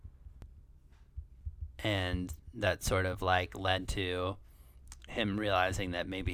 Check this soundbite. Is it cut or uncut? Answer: uncut